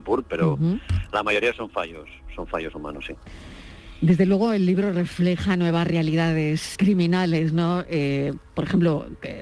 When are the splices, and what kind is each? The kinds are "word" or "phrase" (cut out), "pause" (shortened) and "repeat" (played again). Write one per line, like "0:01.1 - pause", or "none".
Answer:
0:06.8 - word